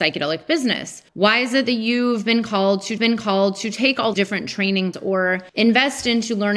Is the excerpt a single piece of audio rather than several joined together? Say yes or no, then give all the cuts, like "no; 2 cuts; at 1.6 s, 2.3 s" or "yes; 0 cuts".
no; 5 cuts; at 1.1 s, 3.0 s, 4.1 s, 4.9 s, 5.5 s